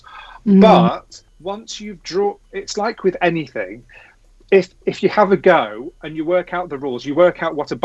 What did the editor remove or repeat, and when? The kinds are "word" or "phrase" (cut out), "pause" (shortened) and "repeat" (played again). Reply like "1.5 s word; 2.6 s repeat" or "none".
1.3 s pause; 4.8 s pause